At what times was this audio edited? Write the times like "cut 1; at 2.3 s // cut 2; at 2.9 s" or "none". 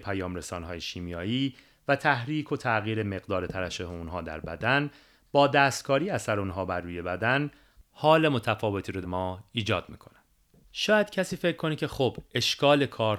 cut 1; at 9.0 s